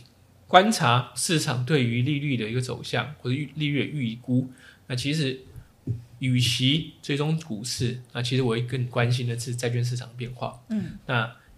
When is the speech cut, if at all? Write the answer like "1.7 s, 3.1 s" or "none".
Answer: 1.2 s